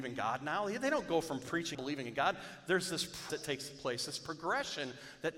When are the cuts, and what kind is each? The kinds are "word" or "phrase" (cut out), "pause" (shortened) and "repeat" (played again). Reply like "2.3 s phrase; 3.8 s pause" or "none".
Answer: 1.7 s phrase; 3.3 s word